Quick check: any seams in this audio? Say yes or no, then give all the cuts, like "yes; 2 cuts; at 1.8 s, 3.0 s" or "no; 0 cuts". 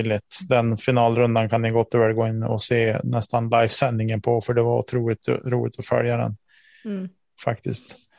no; 0 cuts